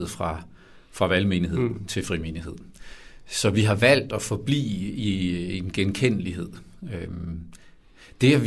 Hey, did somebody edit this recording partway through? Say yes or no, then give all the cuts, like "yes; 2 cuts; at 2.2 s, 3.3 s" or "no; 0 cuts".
no; 0 cuts